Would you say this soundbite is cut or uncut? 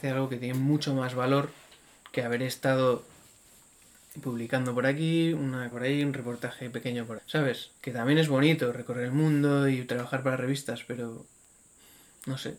cut